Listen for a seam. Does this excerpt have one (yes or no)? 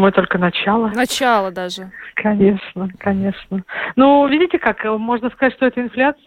no